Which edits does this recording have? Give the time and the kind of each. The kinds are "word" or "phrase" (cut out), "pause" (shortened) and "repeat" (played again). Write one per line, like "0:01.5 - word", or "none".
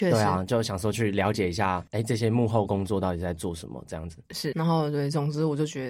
0:01.9 - pause
0:04.5 - word

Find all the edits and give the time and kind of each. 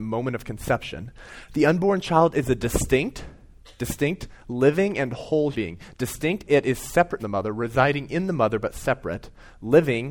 0:03.7 - pause
0:05.5 - word
0:07.2 - word

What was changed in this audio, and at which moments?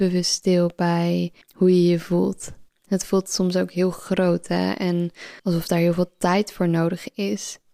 0:01.4 - pause
0:02.7 - pause
0:05.4 - pause

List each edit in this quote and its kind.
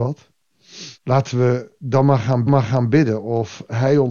0:00.9 - pause
0:02.5 - repeat

